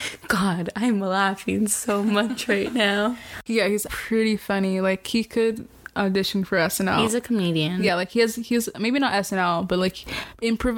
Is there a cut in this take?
yes; 1 cut; at 3.9 s

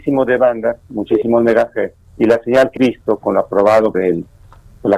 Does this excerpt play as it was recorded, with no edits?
no; 3 cuts; at 2.0 s, 2.8 s, 3.9 s

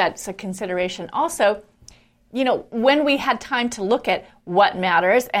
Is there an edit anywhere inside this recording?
no; 0 cuts

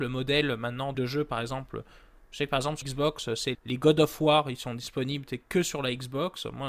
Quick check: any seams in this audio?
yes; 3 cuts; at 0.9 s, 2.8 s, 3.5 s

